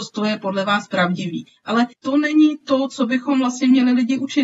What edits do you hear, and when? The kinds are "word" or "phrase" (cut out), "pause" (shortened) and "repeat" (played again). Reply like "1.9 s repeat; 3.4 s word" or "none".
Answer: 1.9 s pause